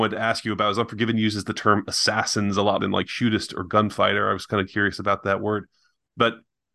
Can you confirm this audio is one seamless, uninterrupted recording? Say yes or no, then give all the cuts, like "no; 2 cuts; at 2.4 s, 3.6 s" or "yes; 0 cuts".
no; 1 cut; at 2.8 s